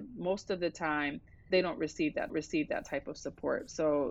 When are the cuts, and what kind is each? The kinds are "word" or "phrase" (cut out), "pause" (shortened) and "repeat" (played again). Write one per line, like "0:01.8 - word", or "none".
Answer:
0:01.5 - word
0:02.3 - repeat